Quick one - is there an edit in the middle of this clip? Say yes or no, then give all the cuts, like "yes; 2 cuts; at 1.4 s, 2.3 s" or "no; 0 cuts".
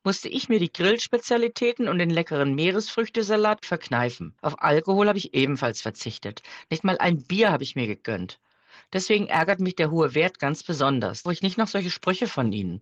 yes; 2 cuts; at 4.4 s, 11.3 s